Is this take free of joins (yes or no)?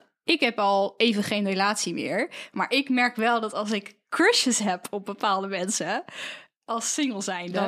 yes